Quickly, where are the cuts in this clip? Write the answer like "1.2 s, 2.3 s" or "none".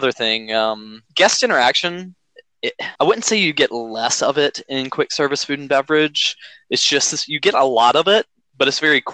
1.0 s, 3.0 s